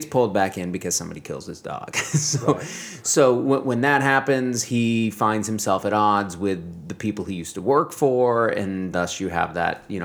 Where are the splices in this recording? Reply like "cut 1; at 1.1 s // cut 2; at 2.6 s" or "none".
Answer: none